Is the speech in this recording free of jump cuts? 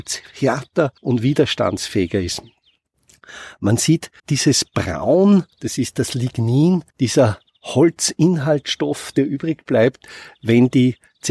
no; 4 cuts; at 1.0 s, 4.2 s, 5.5 s, 6.9 s

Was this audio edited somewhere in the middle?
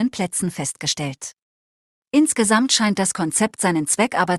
no; 0 cuts

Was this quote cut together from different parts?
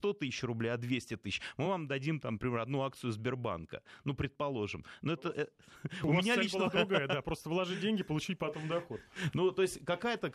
no; 0 cuts

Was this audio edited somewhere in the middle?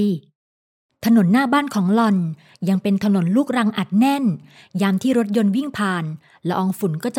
no; 0 cuts

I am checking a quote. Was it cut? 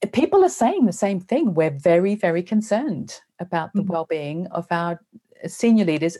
no; 0 cuts

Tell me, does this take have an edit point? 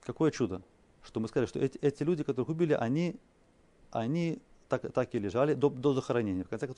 no; 0 cuts

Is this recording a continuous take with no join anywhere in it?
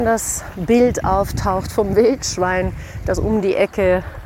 yes; 0 cuts

